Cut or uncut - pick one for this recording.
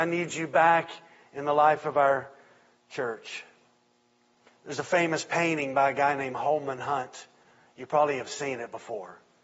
uncut